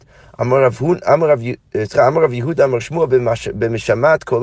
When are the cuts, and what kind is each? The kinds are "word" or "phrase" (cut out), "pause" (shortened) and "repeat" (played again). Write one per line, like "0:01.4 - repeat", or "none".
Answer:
none